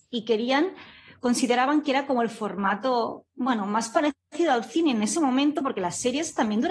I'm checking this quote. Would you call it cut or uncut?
uncut